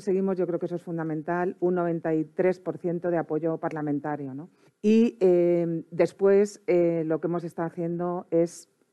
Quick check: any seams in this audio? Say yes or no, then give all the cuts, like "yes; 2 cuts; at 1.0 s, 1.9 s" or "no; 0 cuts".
yes; 1 cut; at 4.7 s